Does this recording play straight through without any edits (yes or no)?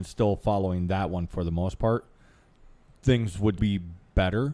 no